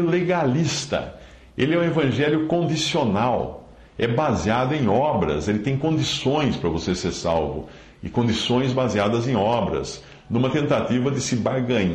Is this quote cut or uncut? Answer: uncut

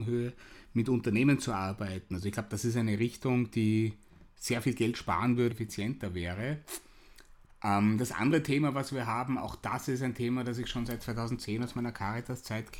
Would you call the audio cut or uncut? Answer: cut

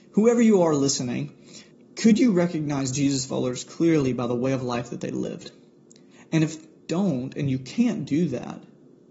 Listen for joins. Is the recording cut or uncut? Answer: cut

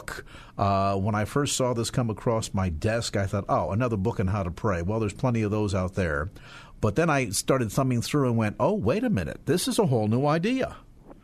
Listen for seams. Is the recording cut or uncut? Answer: uncut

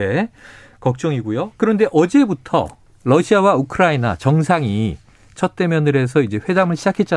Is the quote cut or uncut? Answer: uncut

